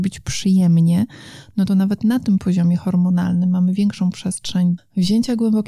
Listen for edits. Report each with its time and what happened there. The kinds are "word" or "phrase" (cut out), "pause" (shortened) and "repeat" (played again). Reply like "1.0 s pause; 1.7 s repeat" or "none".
4.8 s word